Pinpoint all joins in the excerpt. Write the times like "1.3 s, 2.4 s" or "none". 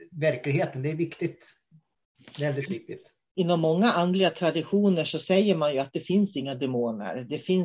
none